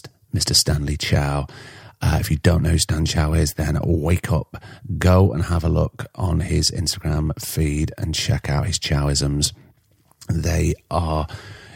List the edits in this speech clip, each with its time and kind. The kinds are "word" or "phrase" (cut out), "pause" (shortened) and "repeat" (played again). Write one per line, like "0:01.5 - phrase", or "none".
none